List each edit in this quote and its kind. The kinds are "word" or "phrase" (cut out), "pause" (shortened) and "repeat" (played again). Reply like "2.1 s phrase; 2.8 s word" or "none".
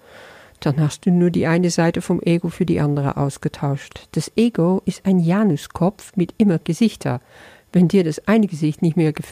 6.6 s word